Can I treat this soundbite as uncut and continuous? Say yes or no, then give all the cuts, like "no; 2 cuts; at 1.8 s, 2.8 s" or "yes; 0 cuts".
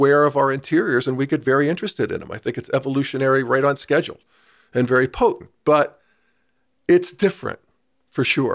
yes; 0 cuts